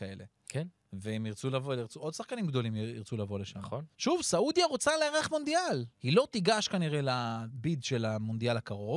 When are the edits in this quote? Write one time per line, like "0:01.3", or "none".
0:03.9
0:05.9